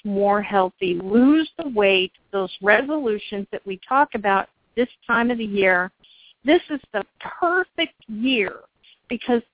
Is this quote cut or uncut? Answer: uncut